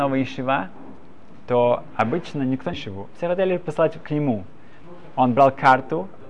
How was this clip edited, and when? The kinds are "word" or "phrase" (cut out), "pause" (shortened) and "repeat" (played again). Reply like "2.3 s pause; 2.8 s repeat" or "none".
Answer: 2.7 s phrase